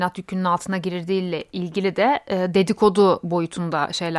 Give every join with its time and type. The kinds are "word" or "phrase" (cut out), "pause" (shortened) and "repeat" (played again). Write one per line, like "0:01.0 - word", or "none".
none